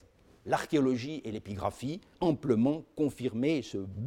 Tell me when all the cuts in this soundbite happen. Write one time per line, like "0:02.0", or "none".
0:02.1

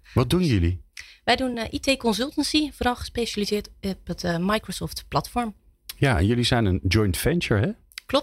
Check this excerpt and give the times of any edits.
none

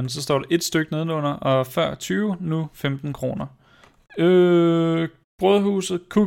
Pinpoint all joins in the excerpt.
0:03.8

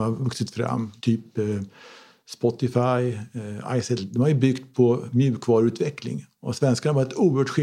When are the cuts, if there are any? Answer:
0:01.0

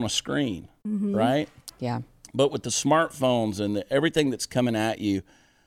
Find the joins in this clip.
none

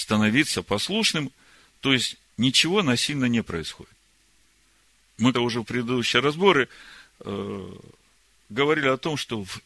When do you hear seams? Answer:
0:05.3

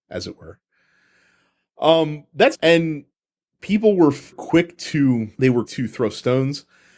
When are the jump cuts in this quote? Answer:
0:02.5
0:04.3
0:05.3
0:05.6

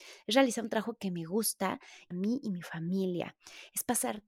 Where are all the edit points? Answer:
0:02.1

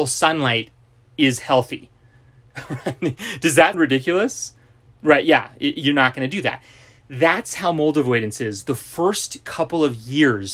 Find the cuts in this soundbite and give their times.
0:03.7

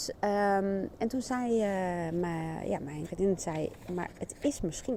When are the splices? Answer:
0:03.0

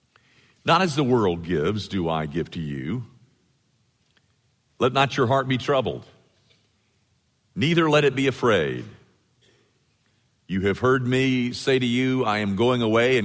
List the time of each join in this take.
none

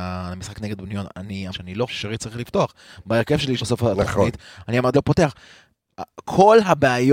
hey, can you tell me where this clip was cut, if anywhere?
0:01.5
0:01.9
0:03.6
0:04.9

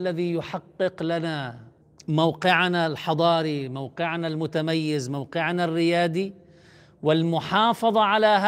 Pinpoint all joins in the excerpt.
0:01.8

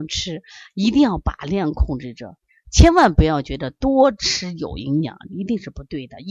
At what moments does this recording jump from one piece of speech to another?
none

